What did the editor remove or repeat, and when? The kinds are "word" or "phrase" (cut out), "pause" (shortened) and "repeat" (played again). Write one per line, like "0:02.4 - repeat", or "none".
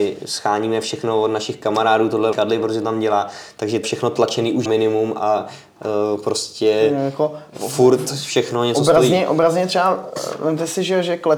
0:02.3 - word
0:03.8 - word
0:04.7 - word